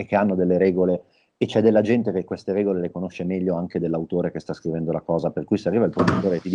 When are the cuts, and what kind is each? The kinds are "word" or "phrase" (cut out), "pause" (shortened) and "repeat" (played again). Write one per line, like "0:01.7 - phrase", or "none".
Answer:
none